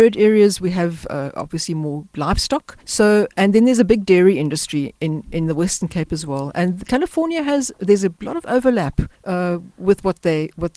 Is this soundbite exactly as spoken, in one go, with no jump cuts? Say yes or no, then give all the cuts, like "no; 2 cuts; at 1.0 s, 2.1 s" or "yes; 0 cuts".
no; 2 cuts; at 2.8 s, 9.1 s